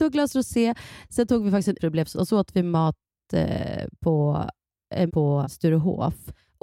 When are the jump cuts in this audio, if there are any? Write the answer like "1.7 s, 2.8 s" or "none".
1.8 s, 2.1 s, 5.1 s, 5.4 s